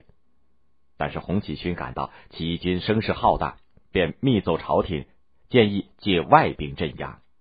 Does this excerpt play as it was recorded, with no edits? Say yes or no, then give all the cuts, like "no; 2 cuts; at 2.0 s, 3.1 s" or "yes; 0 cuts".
yes; 0 cuts